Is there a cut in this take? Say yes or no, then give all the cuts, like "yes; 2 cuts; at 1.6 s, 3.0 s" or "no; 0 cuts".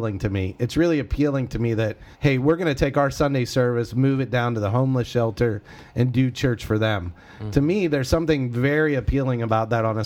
yes; 1 cut; at 2.1 s